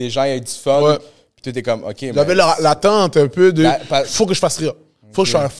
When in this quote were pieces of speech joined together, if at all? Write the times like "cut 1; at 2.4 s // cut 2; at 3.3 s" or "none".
none